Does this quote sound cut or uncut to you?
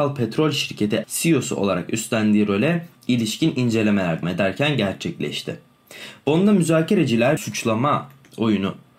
cut